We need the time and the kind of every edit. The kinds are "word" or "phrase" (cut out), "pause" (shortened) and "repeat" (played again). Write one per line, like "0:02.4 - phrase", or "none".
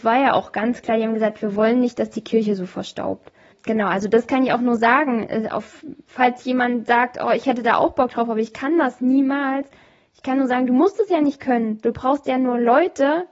none